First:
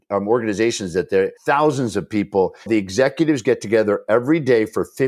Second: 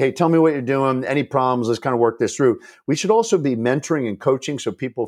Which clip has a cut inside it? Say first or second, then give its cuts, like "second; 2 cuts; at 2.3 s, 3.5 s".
first; 2 cuts; at 1.4 s, 2.7 s